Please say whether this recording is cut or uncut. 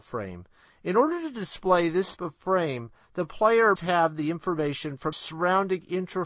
cut